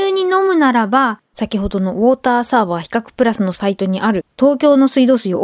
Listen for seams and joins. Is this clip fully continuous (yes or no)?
no